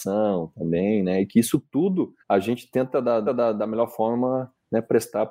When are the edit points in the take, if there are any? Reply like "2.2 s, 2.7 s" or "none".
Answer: 2.2 s, 3.3 s